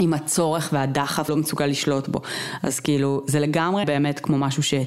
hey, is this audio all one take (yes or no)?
no